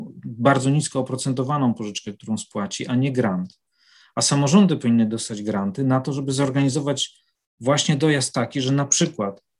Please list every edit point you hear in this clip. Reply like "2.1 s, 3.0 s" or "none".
none